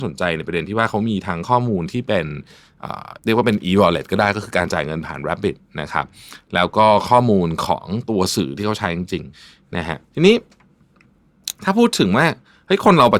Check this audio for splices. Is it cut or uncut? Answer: cut